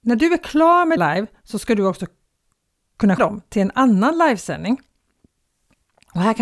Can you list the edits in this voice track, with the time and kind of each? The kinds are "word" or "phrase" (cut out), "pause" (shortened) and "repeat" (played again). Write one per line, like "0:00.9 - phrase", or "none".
0:01.0 - word
0:03.2 - word